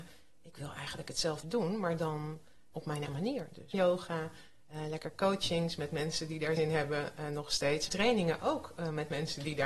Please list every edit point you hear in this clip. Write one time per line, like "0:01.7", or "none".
0:01.4
0:02.7
0:03.1
0:03.7
0:06.6
0:07.9